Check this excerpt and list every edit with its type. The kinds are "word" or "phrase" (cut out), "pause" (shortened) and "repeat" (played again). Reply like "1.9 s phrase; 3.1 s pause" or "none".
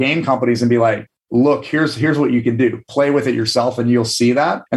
none